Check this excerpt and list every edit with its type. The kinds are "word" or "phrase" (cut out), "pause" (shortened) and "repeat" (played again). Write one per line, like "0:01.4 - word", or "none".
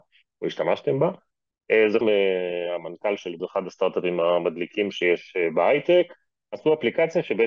0:02.0 - word
0:03.4 - word